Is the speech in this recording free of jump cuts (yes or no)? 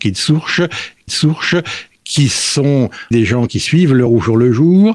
no